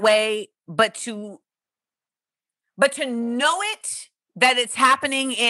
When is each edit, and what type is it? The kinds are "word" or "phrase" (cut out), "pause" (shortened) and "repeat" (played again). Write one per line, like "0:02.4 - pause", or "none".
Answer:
none